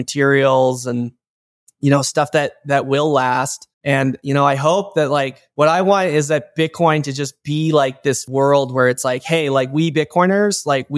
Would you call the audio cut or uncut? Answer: cut